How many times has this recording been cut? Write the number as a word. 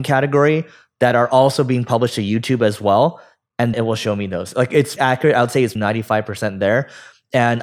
three